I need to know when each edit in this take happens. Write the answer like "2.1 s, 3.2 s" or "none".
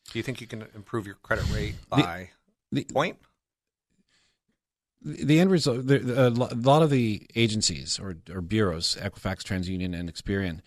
none